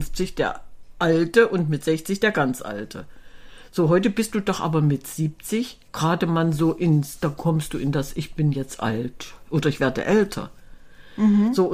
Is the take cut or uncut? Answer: cut